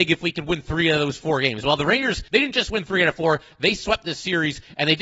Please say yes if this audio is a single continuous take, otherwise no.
no